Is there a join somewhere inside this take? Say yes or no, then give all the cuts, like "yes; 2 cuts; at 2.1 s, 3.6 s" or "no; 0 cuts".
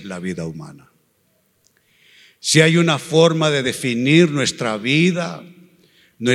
no; 0 cuts